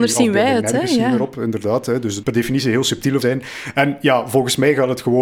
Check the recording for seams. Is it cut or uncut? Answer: cut